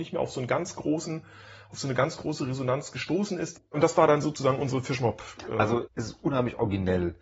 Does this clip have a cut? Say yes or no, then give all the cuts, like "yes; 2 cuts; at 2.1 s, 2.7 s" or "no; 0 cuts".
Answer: yes; 1 cut; at 5.9 s